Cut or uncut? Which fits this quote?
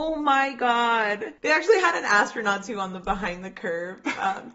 cut